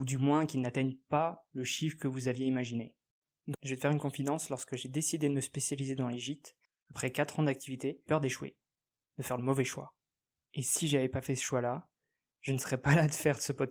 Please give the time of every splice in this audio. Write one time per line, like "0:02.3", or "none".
0:03.5
0:08.1